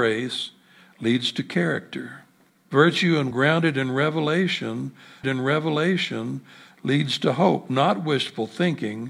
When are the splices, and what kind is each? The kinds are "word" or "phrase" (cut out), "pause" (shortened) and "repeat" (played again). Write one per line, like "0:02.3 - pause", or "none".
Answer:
0:02.5 - pause
0:03.3 - word
0:05.2 - repeat